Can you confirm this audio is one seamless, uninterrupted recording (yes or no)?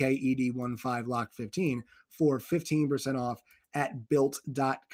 yes